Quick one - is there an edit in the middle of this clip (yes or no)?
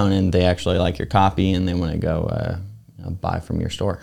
no